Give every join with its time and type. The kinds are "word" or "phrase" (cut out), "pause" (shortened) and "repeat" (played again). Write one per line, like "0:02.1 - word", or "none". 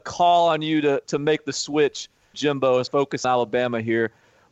0:01.0 - word
0:02.3 - word
0:02.9 - word
0:03.2 - word